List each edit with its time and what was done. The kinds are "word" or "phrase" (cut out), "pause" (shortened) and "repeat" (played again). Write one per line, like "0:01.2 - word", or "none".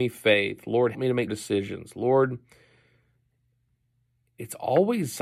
0:00.9 - word
0:01.3 - word